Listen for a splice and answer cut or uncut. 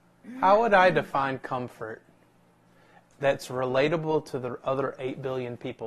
uncut